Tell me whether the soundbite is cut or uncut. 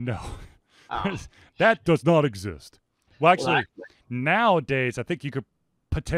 uncut